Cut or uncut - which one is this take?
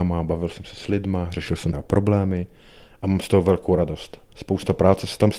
cut